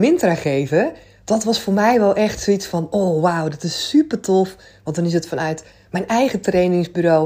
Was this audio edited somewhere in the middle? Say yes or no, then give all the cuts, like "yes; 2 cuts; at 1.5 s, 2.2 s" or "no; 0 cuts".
no; 0 cuts